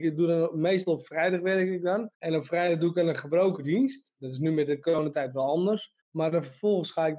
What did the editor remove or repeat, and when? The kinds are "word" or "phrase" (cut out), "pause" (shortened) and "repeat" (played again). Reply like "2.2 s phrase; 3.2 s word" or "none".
2.1 s pause; 6.0 s pause

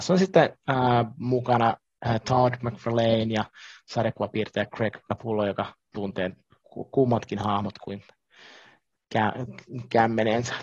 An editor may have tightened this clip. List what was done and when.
none

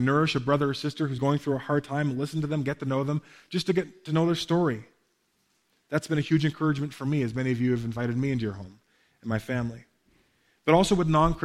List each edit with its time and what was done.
1.2 s word

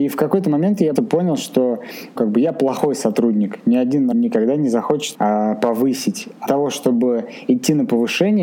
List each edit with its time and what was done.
1.0 s word; 2.2 s word; 4.1 s word; 5.1 s word; 6.5 s word

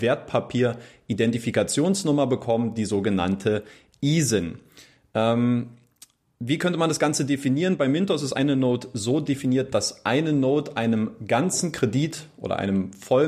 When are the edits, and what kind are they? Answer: none

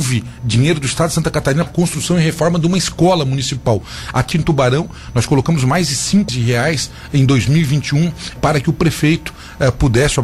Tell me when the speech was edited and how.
1.7 s word; 4.3 s word; 6.3 s word; 8.4 s word

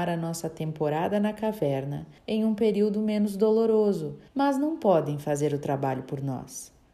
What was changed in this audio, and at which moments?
2.2 s pause; 4.3 s pause

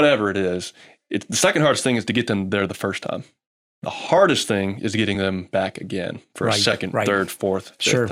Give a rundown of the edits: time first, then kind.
none

